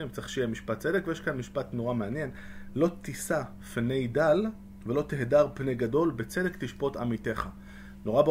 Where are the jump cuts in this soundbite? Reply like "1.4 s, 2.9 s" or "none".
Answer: none

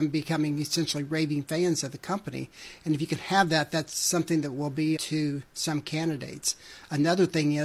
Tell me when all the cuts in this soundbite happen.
5.0 s

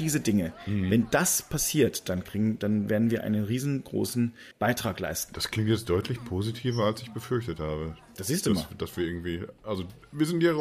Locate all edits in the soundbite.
4.5 s

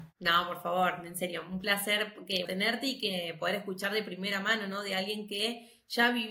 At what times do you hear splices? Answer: 2.5 s

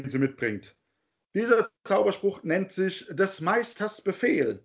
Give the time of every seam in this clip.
none

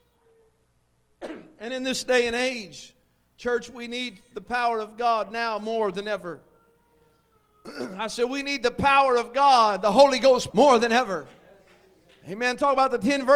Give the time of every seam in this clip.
10.5 s

